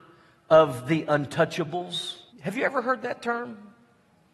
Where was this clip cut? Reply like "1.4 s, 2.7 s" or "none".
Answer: 2.3 s